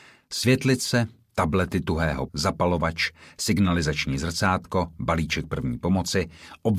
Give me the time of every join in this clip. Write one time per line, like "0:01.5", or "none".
0:02.3